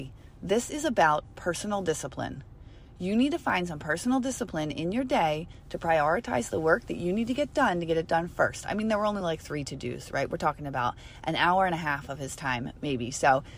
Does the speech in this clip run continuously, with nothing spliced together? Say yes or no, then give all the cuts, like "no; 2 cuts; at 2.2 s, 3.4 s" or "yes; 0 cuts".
yes; 0 cuts